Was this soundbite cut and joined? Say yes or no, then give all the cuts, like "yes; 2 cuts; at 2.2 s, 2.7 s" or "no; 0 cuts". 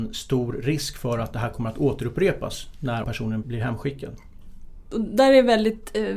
yes; 2 cuts; at 3.0 s, 3.4 s